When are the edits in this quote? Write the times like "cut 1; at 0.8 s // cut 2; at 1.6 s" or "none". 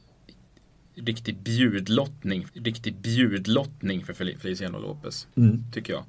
cut 1; at 2.5 s